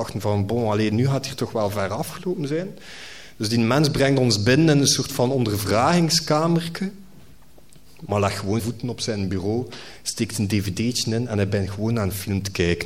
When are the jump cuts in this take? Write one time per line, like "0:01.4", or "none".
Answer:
0:08.6

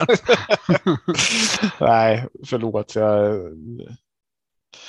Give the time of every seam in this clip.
none

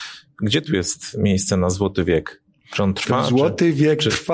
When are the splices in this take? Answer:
none

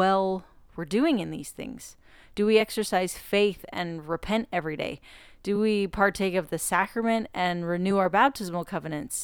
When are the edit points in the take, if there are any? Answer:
none

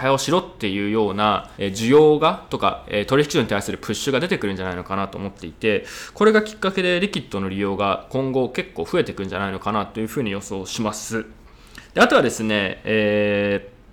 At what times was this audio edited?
0:01.5

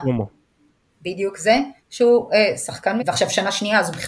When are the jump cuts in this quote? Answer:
0:01.8
0:03.0

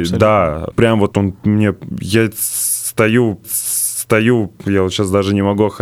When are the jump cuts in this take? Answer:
0:01.1
0:03.4

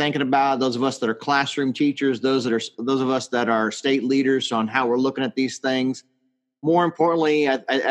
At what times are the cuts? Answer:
none

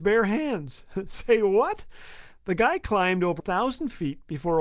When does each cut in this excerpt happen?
0:03.4

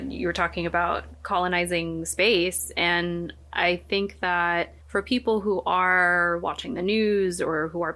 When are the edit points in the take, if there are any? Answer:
0:04.8

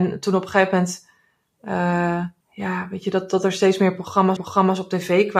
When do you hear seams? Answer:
0:02.4
0:04.4

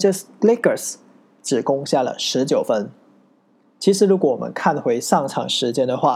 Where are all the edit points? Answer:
none

